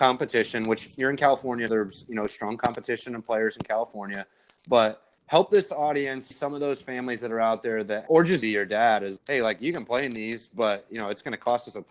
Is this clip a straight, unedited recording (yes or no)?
no